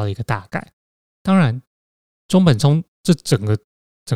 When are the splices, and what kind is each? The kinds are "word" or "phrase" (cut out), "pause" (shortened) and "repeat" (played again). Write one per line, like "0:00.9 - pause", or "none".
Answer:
none